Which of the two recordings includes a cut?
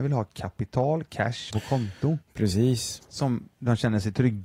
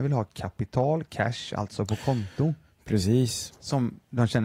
first; 2 cuts; at 1.5 s, 2.2 s

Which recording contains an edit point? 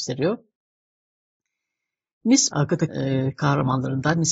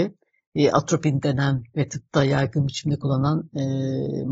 first; 2 cuts; at 2.5 s, 2.9 s

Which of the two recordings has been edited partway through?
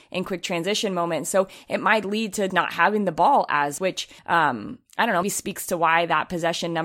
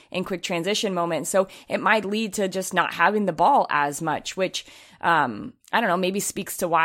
first; 4 cuts; at 2.5 s, 3.8 s, 4.2 s, 5.2 s

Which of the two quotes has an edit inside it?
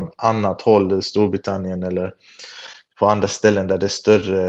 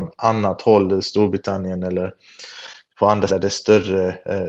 second; 1 cut; at 3.3 s

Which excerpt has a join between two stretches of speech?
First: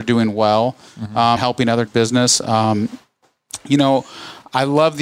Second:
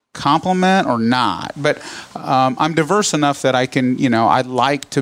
first; 2 cuts; at 1.4 s, 1.9 s

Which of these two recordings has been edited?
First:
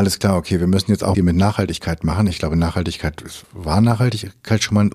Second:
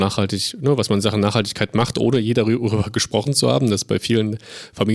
first; 2 cuts; at 1.1 s, 3.4 s

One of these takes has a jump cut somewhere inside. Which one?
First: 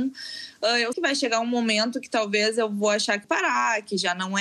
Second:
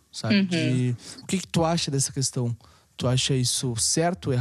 first; 2 cuts; at 0.9 s, 3.2 s

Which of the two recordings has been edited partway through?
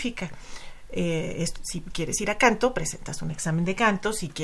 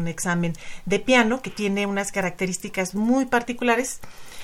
first; 1 cut; at 1.6 s

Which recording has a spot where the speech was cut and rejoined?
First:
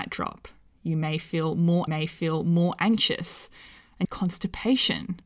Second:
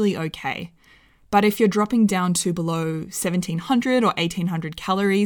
first; 2 cuts; at 1.9 s, 4.0 s

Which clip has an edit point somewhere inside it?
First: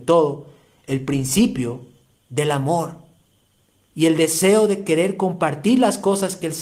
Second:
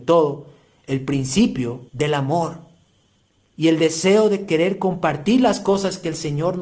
second; 1 cut; at 1.9 s

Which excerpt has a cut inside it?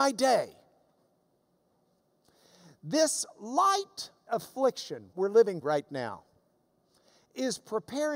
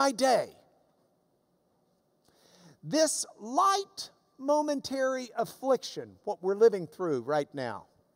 first; 3 cuts; at 4.3 s, 5.1 s, 5.6 s

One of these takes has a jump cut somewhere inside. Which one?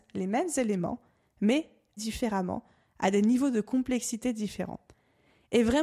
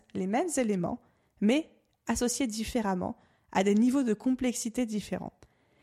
first; 1 cut; at 2.0 s

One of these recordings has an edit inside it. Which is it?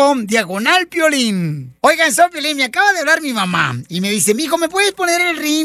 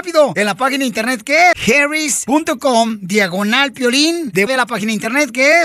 second; 2 cuts; at 1.5 s, 4.5 s

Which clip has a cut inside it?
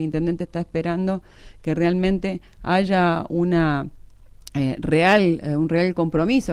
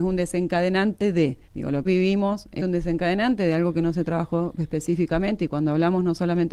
second; 3 cuts; at 1.4 s, 1.8 s, 2.6 s

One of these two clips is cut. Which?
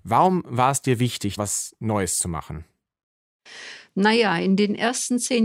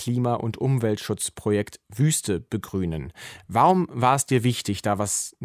first; 1 cut; at 1.4 s

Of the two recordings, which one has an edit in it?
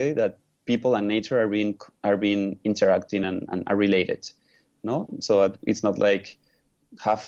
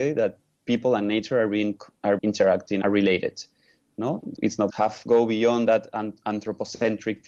second; 4 cuts; at 2.2 s, 2.8 s, 4.4 s, 4.7 s

